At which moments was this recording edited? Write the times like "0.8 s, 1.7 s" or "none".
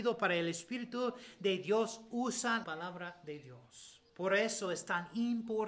2.6 s, 4.1 s